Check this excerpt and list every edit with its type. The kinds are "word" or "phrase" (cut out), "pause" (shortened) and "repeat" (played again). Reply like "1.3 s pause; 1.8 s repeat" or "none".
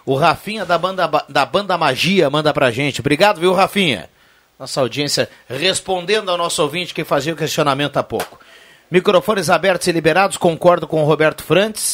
none